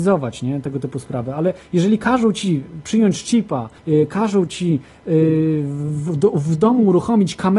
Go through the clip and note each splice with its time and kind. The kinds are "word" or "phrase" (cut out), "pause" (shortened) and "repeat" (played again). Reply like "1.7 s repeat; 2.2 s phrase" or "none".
3.8 s pause